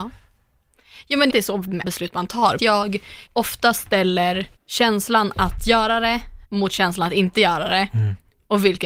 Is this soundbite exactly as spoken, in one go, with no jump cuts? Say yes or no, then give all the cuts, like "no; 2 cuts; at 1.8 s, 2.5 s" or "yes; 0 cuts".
no; 6 cuts; at 1.3 s, 1.8 s, 2.6 s, 3.3 s, 4.6 s, 6.4 s